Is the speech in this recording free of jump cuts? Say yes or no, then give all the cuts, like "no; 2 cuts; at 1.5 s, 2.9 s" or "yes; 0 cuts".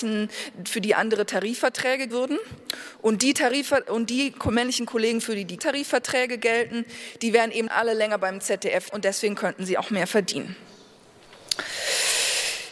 no; 4 cuts; at 2.1 s, 5.6 s, 7.7 s, 8.9 s